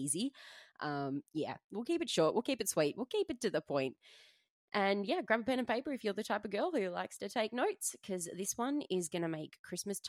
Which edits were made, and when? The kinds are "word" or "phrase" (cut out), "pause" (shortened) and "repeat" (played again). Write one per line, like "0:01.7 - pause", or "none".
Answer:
0:01.2 - word